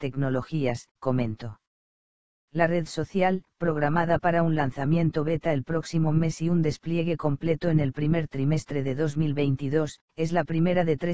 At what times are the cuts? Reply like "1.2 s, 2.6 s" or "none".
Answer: 1.0 s, 3.5 s, 10.1 s